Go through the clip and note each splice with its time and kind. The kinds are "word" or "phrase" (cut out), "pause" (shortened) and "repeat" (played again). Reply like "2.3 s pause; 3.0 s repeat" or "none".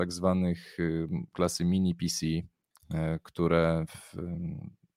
1.3 s word

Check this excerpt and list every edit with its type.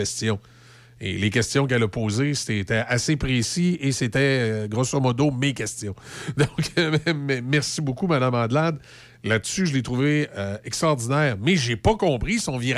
none

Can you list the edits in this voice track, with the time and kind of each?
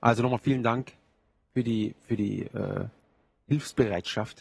none

